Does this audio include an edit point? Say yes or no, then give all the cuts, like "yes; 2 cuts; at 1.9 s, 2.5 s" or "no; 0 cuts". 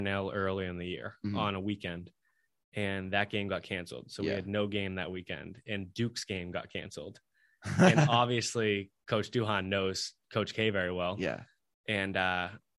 no; 0 cuts